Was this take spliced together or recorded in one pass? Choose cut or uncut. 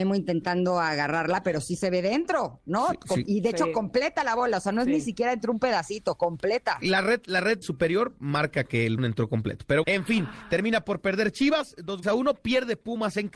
cut